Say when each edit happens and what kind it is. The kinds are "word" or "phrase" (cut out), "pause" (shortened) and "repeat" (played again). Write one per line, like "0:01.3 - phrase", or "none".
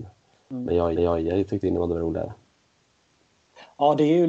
0:01.0 - repeat